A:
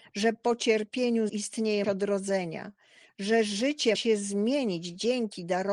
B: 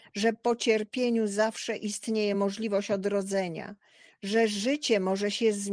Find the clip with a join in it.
A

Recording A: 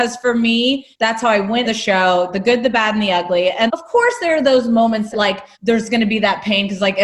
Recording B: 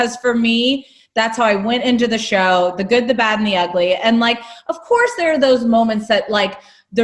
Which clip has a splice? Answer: A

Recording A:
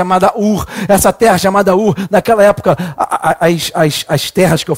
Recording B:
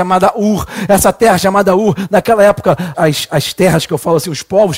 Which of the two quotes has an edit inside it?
B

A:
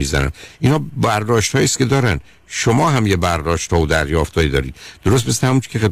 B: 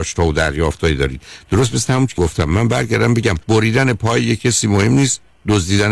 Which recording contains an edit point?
B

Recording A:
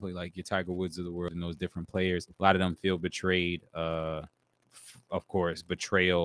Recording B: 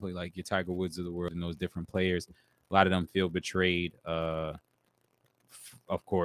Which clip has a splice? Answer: A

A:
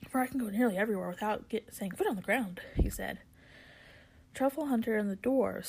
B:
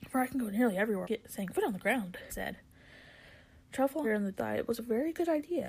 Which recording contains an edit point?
B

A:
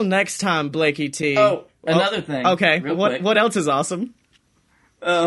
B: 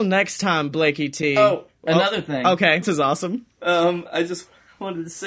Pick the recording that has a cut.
B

